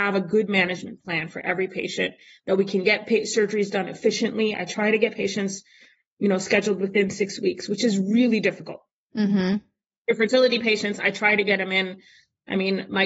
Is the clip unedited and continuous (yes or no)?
yes